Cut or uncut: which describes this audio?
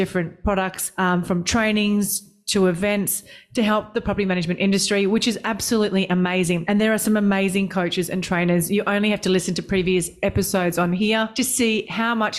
uncut